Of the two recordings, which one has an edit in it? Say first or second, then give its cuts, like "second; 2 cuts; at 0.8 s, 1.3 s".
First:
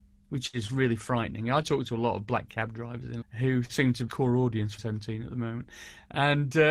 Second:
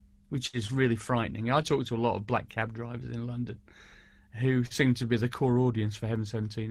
first; 3 cuts; at 3.2 s, 4.1 s, 4.8 s